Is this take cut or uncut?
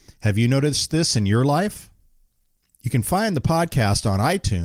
uncut